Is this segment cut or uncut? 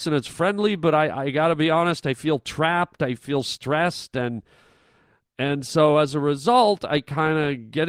uncut